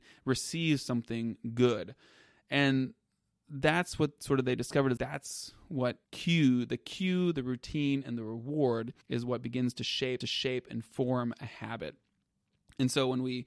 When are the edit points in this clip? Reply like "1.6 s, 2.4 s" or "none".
5.0 s, 6.0 s, 9.0 s, 10.2 s